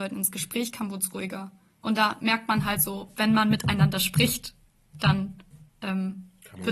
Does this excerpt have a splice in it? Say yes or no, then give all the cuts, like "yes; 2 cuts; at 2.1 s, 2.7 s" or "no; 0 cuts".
no; 0 cuts